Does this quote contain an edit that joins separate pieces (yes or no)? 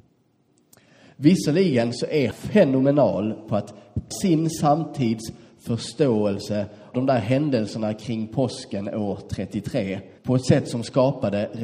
yes